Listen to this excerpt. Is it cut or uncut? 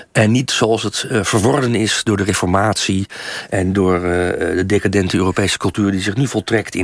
uncut